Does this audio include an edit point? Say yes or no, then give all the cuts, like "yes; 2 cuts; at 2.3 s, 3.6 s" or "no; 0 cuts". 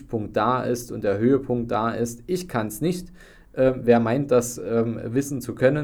no; 0 cuts